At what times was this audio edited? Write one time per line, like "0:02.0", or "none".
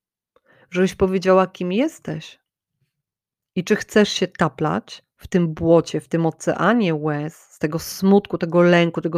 none